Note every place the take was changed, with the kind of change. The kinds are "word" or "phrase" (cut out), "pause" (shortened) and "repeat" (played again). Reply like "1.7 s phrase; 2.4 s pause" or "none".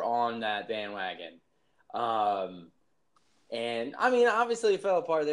none